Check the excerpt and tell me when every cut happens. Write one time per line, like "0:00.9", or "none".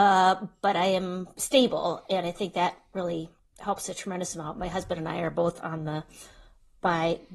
none

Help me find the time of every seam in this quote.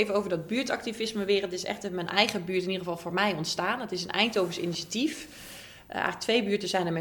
none

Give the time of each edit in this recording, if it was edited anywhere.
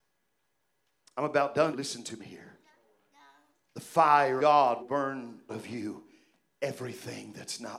0:01.7
0:02.2
0:04.4
0:04.8
0:05.5

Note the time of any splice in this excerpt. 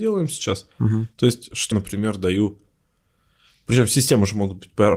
0:01.7

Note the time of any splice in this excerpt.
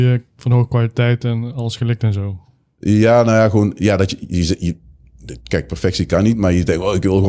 none

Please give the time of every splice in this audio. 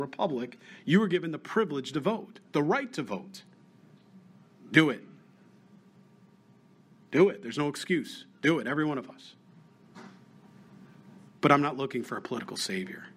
0:11.3

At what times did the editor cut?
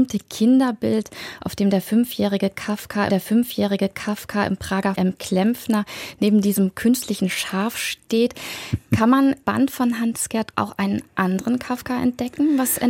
0:03.1
0:05.0
0:09.4
0:10.5

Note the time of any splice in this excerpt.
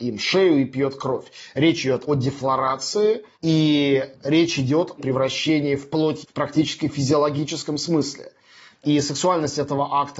0:02.1
0:03.3
0:05.0
0:06.2

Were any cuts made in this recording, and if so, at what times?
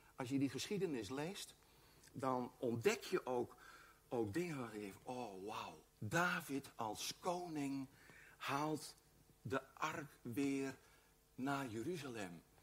0:02.6
0:05.9

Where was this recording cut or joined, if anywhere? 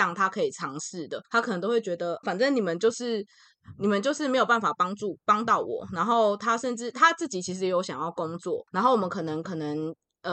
0:01.2
0:02.2
0:08.7

